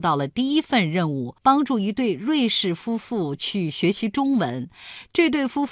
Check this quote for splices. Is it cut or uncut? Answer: cut